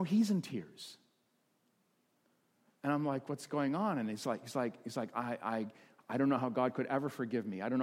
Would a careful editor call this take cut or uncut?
uncut